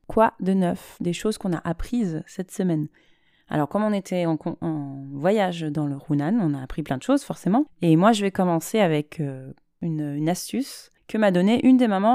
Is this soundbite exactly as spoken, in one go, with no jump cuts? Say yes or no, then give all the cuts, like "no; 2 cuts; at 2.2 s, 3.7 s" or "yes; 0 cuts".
yes; 0 cuts